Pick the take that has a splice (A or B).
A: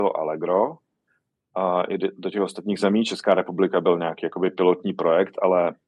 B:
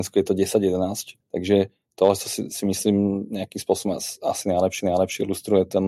B